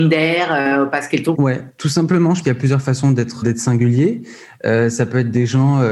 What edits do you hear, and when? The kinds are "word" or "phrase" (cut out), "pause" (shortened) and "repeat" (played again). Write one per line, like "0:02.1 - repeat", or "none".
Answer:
0:01.3 - word
0:02.4 - word
0:03.4 - word